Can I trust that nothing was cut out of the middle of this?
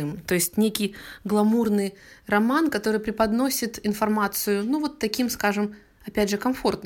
yes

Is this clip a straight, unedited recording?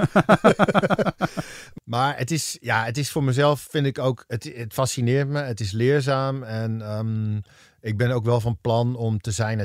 yes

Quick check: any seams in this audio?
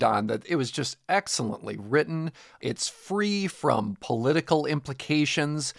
no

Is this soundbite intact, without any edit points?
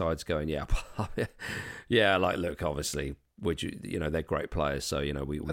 yes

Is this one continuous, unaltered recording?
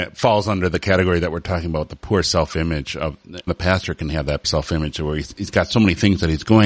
no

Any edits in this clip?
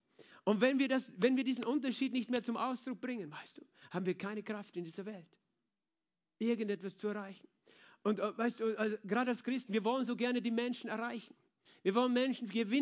no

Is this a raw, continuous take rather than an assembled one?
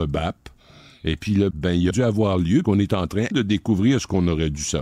no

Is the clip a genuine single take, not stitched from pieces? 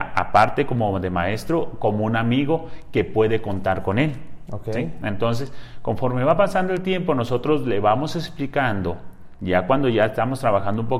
yes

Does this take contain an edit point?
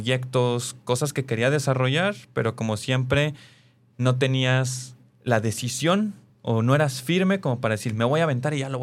no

